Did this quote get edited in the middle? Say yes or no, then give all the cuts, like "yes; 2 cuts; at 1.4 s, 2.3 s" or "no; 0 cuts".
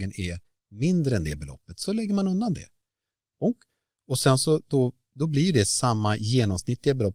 no; 0 cuts